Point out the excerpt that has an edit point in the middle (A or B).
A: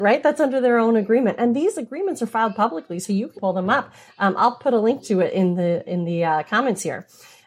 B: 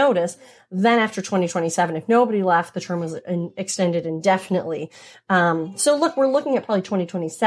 A